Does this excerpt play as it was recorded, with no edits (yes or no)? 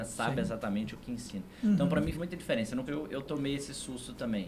no